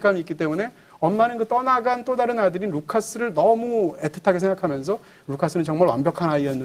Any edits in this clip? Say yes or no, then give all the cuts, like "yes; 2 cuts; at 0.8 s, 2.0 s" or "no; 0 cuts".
no; 0 cuts